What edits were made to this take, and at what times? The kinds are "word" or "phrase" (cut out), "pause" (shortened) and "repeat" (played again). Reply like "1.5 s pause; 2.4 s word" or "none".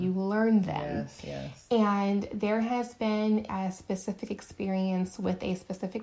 3.5 s word